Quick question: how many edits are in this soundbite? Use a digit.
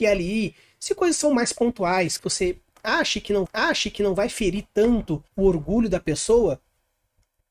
3